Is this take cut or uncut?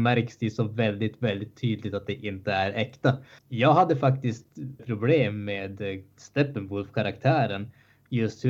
cut